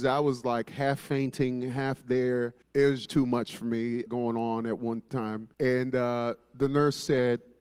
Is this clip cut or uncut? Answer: cut